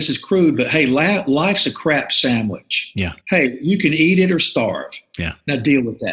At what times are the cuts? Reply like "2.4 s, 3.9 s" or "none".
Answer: 3.2 s